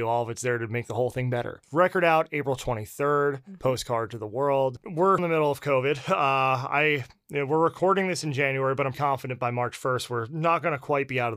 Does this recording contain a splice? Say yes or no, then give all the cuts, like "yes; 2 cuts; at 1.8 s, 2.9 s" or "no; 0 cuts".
yes; 2 cuts; at 5.2 s, 8.9 s